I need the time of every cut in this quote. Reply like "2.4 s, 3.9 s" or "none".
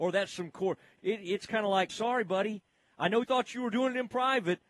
1.0 s, 1.9 s, 3.2 s